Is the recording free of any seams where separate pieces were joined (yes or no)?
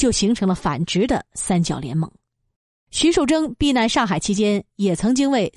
yes